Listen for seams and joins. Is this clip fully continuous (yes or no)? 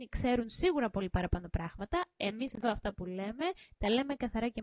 yes